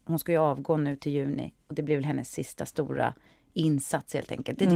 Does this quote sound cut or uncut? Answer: uncut